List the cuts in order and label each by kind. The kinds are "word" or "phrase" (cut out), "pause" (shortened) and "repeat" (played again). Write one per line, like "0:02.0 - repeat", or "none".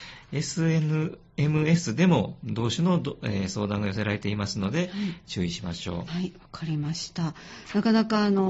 0:06.1 - word